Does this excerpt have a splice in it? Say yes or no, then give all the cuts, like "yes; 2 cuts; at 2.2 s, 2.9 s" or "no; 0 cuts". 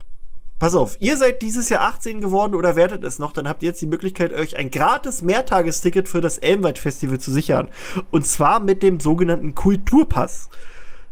no; 0 cuts